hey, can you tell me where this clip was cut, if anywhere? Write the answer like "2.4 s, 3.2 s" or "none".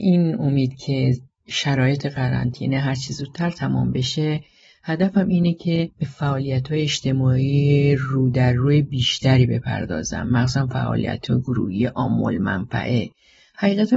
none